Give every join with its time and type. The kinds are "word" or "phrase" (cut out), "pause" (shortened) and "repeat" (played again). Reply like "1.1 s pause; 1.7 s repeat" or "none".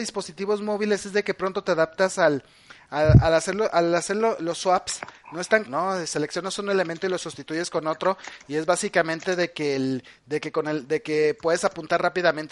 5.7 s word